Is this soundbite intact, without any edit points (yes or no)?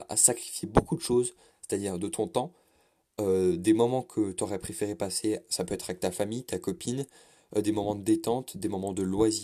yes